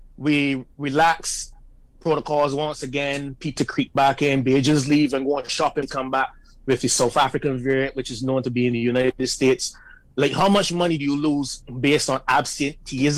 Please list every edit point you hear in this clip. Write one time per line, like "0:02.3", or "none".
0:03.6
0:05.8